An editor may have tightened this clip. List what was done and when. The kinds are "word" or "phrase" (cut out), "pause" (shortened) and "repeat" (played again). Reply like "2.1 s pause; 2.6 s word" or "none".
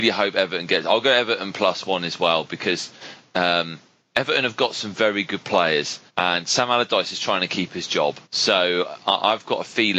4.0 s pause; 6.1 s pause; 8.2 s pause